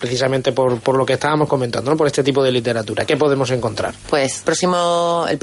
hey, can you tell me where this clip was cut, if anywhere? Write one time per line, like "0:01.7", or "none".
0:03.1
0:04.4